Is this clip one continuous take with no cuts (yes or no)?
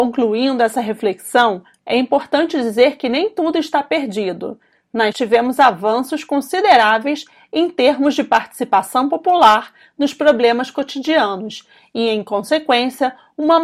no